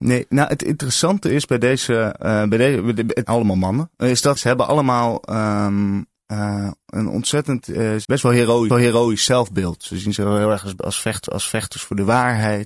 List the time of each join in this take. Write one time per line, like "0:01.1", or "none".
0:03.2
0:04.4
0:08.0
0:08.7
0:11.3